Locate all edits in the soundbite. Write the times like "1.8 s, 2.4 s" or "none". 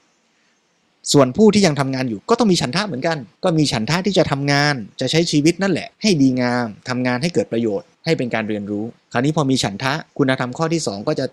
3.4 s, 5.9 s, 7.9 s, 9.0 s, 10.1 s